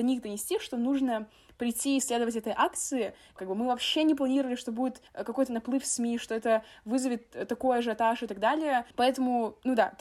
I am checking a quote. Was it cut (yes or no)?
yes